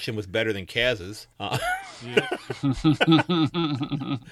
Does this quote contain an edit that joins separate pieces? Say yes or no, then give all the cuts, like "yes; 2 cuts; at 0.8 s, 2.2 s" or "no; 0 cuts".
yes; 1 cut; at 1.3 s